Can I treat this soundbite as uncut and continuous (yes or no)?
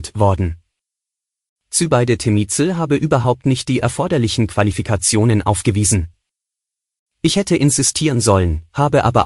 yes